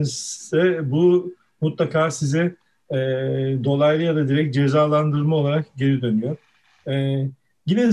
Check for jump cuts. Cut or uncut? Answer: uncut